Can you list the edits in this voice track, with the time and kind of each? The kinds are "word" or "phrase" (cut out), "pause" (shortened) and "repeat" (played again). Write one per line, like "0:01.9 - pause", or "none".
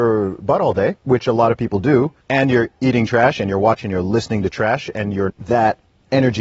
0:01.0 - pause
0:02.2 - pause
0:03.8 - word
0:05.3 - phrase